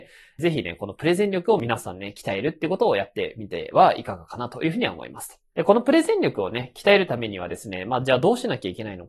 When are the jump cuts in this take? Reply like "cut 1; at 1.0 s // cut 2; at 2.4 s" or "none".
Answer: cut 1; at 5.5 s

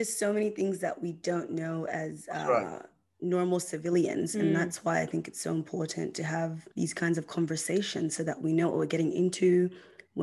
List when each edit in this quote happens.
cut 1; at 6.7 s

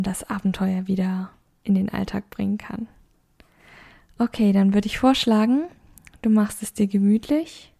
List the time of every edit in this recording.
none

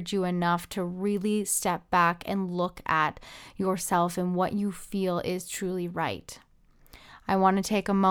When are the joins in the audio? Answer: none

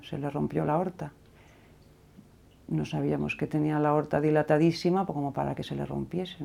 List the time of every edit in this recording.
none

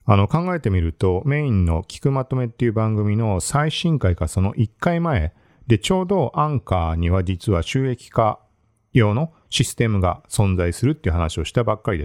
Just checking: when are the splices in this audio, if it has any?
none

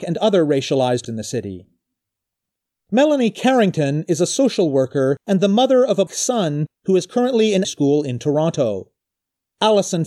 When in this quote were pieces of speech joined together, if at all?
cut 1; at 1.1 s // cut 2; at 6.1 s // cut 3; at 7.6 s

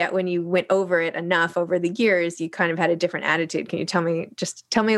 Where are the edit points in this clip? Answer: none

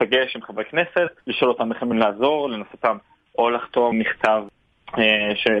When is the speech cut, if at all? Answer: cut 1; at 1.2 s // cut 2; at 1.9 s // cut 3; at 2.7 s // cut 4; at 3.9 s

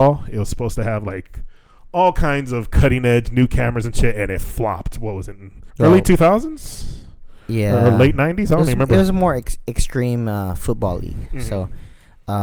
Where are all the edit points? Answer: cut 1; at 5.7 s

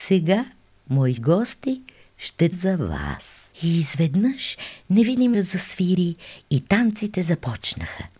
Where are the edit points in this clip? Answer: cut 1; at 1.2 s // cut 2; at 2.5 s // cut 3; at 3.5 s // cut 4; at 5.3 s

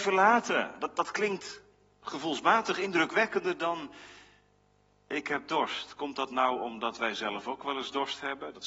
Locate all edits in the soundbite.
none

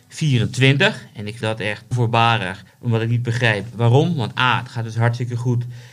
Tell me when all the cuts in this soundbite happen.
cut 1; at 1.4 s // cut 2; at 1.9 s // cut 3; at 2.7 s // cut 4; at 3.7 s

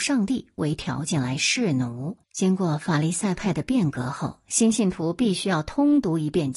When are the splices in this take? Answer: cut 1; at 2.2 s

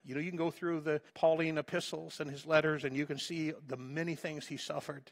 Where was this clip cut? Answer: cut 1; at 1.1 s

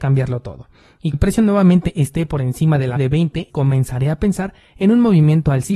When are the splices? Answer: cut 1; at 1.1 s // cut 2; at 3.0 s // cut 3; at 3.5 s

